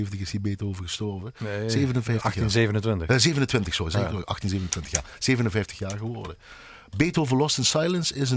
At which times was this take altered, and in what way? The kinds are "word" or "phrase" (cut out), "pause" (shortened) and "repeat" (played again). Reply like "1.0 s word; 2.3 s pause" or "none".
none

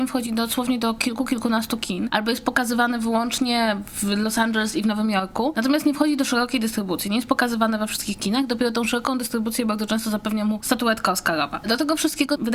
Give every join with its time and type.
none

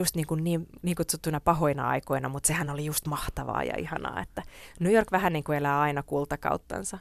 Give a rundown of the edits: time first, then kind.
none

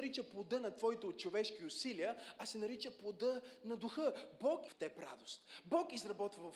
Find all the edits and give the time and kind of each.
4.7 s word

